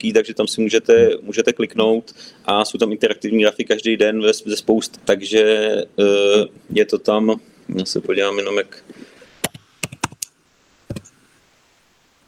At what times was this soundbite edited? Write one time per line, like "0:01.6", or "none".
0:05.0